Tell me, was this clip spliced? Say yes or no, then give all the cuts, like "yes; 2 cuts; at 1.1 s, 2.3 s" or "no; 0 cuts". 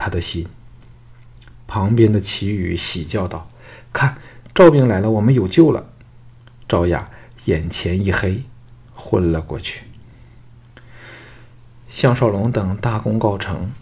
no; 0 cuts